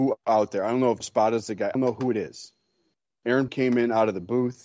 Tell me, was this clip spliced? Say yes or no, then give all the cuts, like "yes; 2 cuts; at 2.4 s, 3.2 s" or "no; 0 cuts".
yes; 3 cuts; at 1.0 s, 1.7 s, 3.5 s